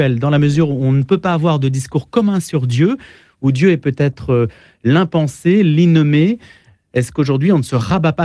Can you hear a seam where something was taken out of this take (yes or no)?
no